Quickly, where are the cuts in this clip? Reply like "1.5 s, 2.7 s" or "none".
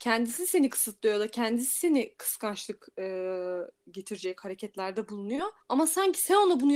5.6 s

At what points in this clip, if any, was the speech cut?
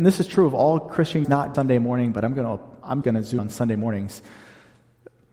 1.2 s, 1.5 s, 3.0 s, 3.4 s

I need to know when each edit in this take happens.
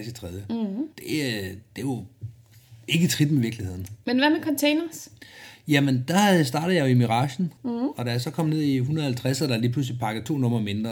0.9 s, 2.8 s, 7.6 s

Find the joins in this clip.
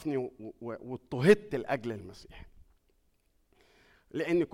none

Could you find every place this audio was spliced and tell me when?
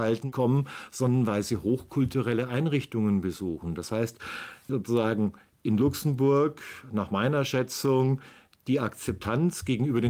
none

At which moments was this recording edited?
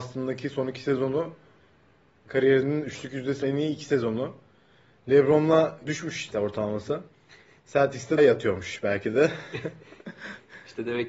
3.4 s, 5.8 s, 6.3 s, 8.2 s

